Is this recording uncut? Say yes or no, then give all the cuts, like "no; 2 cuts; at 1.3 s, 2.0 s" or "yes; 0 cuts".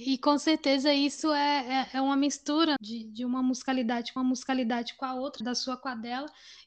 no; 3 cuts; at 2.8 s, 4.2 s, 5.4 s